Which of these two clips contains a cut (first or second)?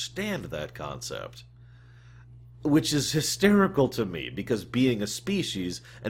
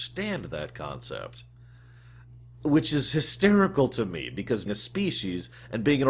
second